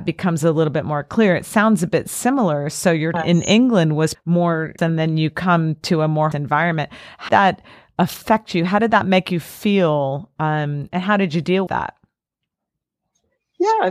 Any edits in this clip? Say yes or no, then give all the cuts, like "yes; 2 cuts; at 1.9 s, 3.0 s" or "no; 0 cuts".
yes; 7 cuts; at 3.1 s, 4.1 s, 4.8 s, 6.3 s, 7.3 s, 10.9 s, 11.7 s